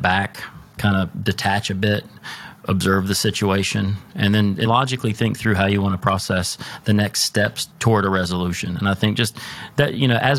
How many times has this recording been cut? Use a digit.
2